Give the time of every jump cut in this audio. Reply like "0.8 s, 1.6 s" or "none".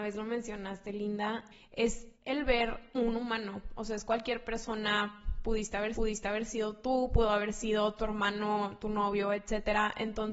2.1 s, 2.9 s, 5.9 s